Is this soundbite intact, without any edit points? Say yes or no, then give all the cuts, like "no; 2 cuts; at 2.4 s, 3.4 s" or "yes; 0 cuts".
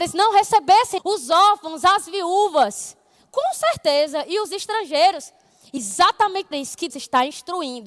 no; 4 cuts; at 1.0 s, 5.8 s, 6.5 s, 6.9 s